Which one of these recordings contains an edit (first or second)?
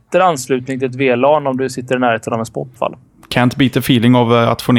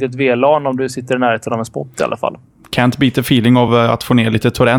first